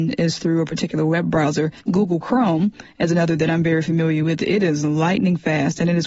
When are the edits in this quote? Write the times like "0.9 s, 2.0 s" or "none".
1.8 s